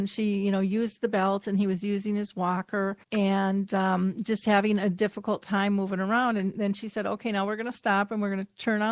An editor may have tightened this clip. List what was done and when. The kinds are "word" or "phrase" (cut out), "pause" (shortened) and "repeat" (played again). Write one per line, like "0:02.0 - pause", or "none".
0:03.0 - pause